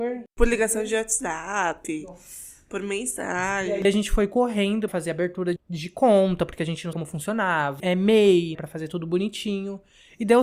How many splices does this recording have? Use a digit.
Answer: 6